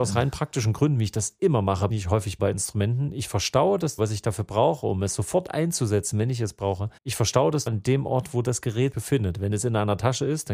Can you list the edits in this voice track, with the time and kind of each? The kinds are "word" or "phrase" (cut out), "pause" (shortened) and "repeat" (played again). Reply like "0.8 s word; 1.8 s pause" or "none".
1.9 s phrase; 2.4 s word; 4.0 s word; 7.0 s pause; 7.7 s word; 8.9 s word